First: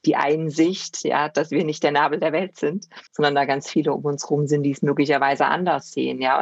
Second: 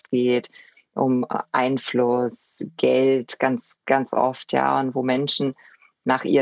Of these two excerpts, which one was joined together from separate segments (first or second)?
first